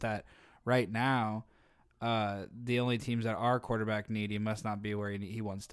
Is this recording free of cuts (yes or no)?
yes